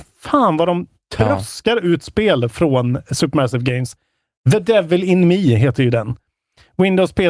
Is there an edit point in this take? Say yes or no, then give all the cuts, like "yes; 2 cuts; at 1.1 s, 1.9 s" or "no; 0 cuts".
no; 0 cuts